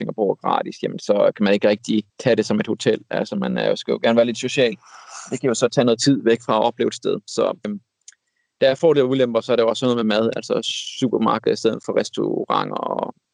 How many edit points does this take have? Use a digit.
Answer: 2